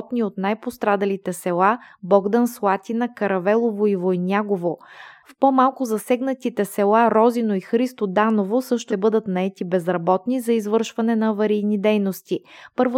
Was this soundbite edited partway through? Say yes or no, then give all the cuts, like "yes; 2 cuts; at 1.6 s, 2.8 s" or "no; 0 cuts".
yes; 1 cut; at 8.9 s